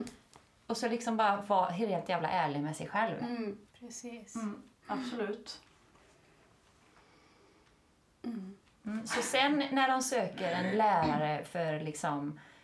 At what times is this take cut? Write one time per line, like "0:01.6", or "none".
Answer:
0:03.7